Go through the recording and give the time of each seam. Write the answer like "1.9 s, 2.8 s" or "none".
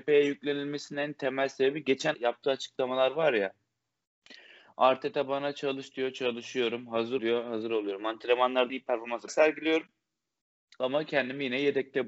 2.1 s, 7.2 s, 8.7 s, 9.3 s